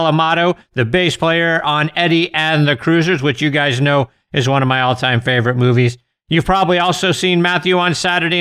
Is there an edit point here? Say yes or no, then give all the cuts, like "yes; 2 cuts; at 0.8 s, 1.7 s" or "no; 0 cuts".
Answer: no; 0 cuts